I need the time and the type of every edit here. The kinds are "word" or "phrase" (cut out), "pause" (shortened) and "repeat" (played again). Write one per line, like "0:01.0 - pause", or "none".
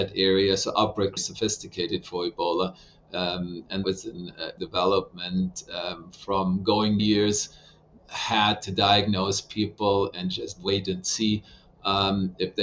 0:01.2 - phrase
0:03.8 - word
0:04.6 - word
0:07.0 - phrase
0:08.0 - phrase